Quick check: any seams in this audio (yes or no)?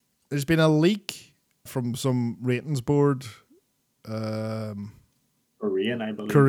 yes